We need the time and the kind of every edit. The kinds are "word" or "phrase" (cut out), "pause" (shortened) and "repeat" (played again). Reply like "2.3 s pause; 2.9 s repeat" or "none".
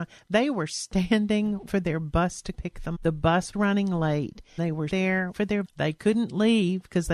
1.7 s word; 2.5 s word; 2.9 s word; 3.5 s word; 4.6 s word; 4.9 s word; 5.3 s word; 5.6 s word